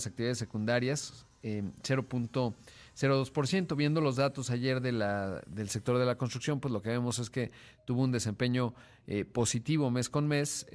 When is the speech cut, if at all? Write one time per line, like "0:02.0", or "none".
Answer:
none